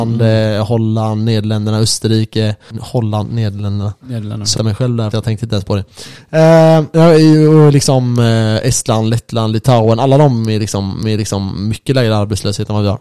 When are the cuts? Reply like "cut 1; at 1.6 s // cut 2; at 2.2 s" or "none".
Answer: cut 1; at 4.6 s // cut 2; at 5.1 s // cut 3; at 11.0 s